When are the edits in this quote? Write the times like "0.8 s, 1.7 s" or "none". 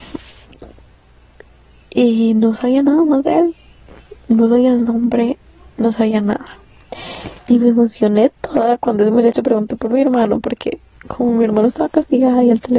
none